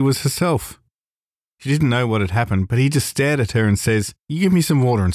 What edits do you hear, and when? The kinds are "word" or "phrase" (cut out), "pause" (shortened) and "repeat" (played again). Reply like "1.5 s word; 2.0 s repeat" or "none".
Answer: 4.2 s pause